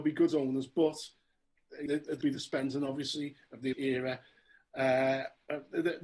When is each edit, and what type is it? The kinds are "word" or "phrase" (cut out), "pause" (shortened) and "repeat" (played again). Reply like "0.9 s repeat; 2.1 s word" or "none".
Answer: 1.9 s word; 2.2 s word; 3.7 s word